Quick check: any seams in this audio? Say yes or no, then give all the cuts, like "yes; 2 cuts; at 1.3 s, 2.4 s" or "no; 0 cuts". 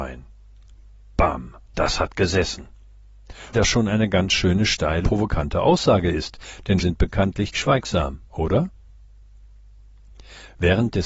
yes; 6 cuts; at 1.7 s, 3.5 s, 5.0 s, 6.8 s, 7.5 s, 8.3 s